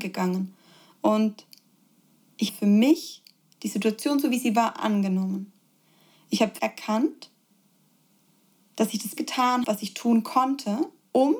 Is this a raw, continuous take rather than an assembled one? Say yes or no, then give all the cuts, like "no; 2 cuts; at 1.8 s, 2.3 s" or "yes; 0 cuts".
no; 4 cuts; at 2.5 s, 6.6 s, 9.2 s, 9.6 s